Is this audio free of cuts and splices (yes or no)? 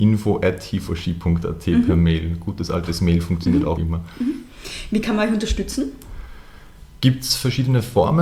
no